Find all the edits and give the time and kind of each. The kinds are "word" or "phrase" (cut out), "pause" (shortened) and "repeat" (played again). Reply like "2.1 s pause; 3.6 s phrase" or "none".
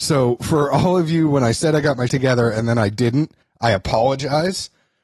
2.1 s word; 3.4 s pause